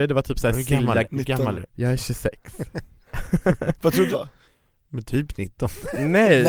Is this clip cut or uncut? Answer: cut